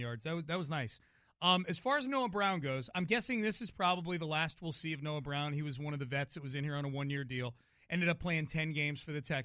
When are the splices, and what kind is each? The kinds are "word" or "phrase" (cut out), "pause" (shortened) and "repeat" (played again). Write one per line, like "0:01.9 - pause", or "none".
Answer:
none